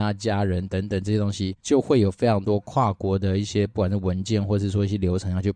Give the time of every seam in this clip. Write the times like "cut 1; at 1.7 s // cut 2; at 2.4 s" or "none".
cut 1; at 1.6 s